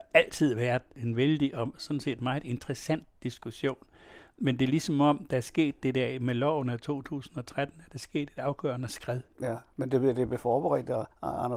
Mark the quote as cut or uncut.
uncut